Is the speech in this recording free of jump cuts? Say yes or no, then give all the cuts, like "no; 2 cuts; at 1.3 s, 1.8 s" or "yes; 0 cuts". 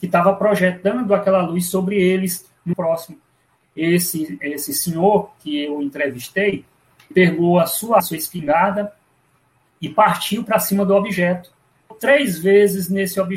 no; 4 cuts; at 2.7 s, 7.1 s, 8.0 s, 11.9 s